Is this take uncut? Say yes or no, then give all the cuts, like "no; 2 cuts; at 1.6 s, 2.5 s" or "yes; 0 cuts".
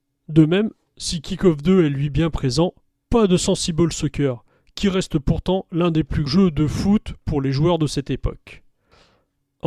no; 1 cut; at 6.3 s